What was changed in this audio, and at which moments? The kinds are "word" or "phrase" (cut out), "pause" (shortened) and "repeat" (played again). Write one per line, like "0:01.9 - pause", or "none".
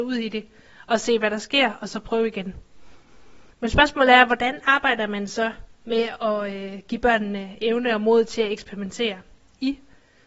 0:03.5 - pause